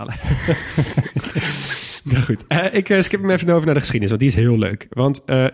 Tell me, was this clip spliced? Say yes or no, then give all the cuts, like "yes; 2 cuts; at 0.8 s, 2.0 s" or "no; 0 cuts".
no; 0 cuts